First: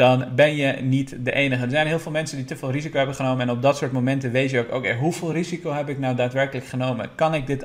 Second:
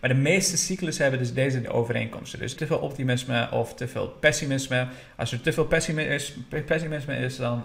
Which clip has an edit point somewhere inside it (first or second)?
second